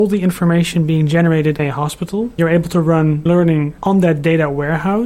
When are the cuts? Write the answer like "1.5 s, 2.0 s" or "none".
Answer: 1.6 s, 2.4 s, 3.3 s, 3.8 s